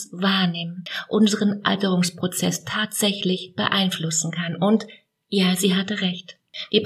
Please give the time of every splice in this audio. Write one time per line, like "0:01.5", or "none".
none